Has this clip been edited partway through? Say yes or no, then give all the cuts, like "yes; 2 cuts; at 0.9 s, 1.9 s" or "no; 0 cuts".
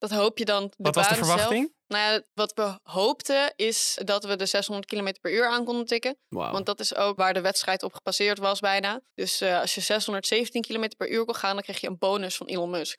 yes; 2 cuts; at 2.3 s, 9.1 s